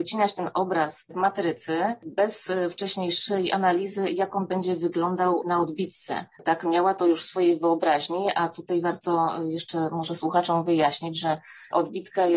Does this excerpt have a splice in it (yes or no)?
yes